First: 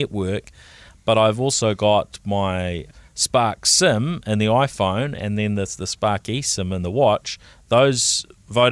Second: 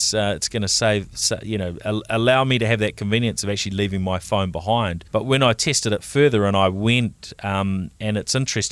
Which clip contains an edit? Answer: second; 1 cut; at 5.1 s

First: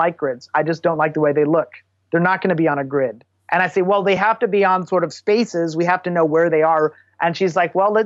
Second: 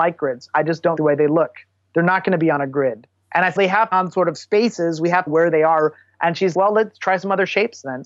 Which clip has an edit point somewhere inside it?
second; 5 cuts; at 1.0 s, 3.6 s, 3.9 s, 5.3 s, 6.5 s

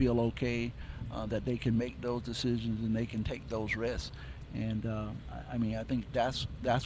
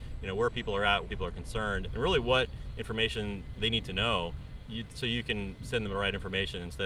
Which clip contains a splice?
second; 5 cuts; at 1.0 s, 1.9 s, 3.6 s, 4.7 s, 5.6 s

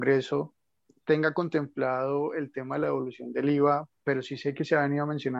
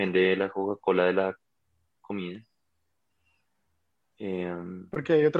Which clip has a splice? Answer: first; 1 cut; at 4.0 s

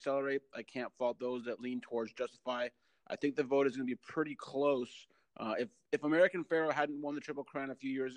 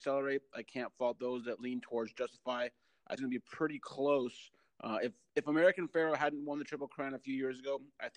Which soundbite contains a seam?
second; 1 cut; at 3.2 s

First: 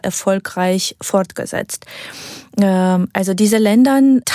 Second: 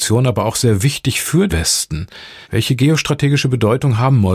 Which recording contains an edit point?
second; 2 cuts; at 1.5 s, 2.4 s

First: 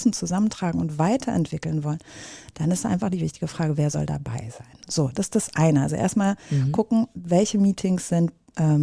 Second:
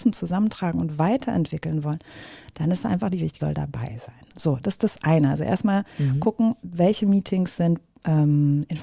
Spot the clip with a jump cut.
second; 1 cut; at 3.4 s

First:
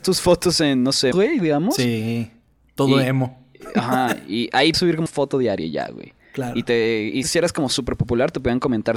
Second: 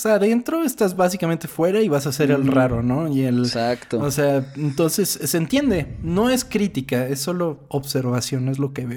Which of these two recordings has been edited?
first; 4 cuts; at 1.1 s, 4.7 s, 5.1 s, 7.2 s

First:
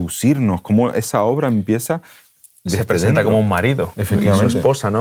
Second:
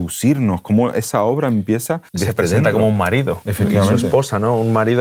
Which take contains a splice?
second; 1 cut; at 2.1 s

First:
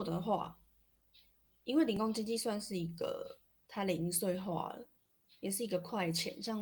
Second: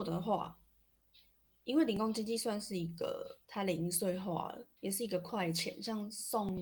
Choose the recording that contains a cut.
second; 2 cuts; at 3.4 s, 4.8 s

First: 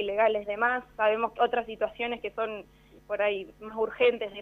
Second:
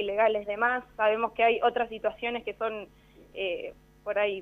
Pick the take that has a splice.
first; 2 cuts; at 1.4 s, 3.0 s

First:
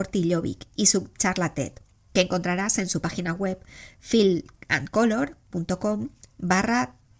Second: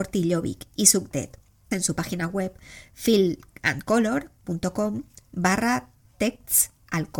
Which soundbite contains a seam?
second; 2 cuts; at 1.1 s, 1.7 s

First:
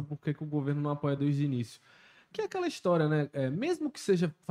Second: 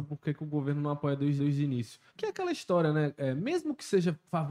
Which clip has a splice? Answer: second; 2 cuts; at 1.4 s, 2.1 s

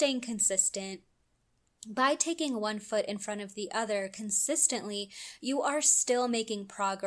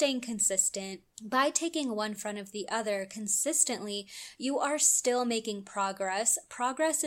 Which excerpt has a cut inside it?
second; 2 cuts; at 1.1 s, 2.2 s

